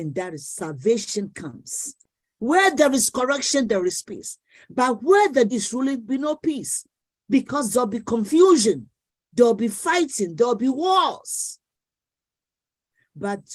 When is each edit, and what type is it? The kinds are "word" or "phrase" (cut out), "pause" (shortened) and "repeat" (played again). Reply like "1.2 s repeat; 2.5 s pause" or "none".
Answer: 5.5 s word; 6.1 s word